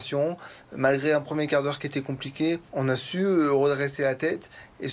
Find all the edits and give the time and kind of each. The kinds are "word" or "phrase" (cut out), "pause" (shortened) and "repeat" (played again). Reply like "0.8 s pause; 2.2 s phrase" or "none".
2.7 s pause